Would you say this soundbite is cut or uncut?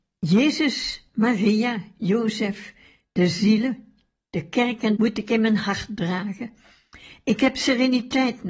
cut